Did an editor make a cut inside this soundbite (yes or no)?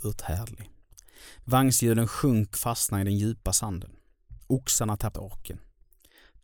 yes